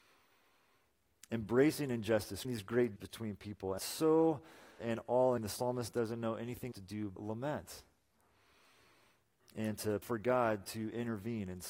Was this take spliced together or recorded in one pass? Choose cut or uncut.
cut